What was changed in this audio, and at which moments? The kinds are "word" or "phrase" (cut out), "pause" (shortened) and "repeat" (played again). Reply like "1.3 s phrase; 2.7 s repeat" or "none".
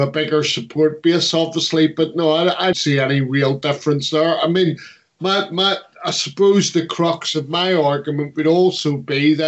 2.7 s word